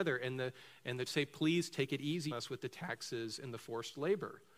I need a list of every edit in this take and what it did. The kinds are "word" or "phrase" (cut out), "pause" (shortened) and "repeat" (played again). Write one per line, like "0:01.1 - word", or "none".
0:01.1 - word
0:02.3 - word